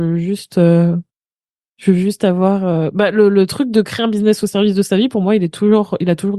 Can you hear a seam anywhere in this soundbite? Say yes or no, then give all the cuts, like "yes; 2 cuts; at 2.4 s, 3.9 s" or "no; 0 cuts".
no; 0 cuts